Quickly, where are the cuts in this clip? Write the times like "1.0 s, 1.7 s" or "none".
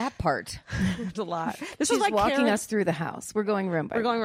1.1 s